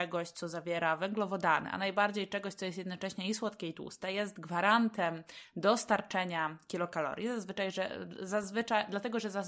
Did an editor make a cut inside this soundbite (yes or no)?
no